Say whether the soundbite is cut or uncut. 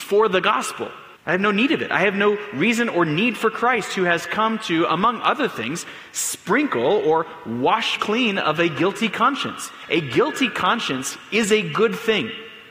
cut